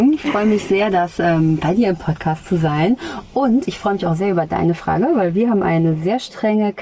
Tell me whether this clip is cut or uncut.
uncut